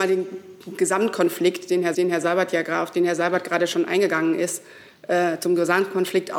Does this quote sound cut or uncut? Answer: cut